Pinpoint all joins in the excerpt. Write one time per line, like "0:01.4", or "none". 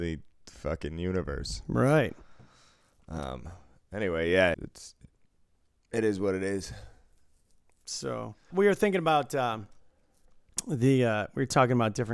0:04.5
0:08.5